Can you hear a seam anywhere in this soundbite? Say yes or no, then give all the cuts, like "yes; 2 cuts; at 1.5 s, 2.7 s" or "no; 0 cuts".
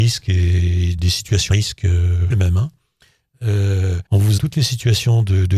yes; 5 cuts; at 1.0 s, 1.5 s, 2.3 s, 4.1 s, 4.4 s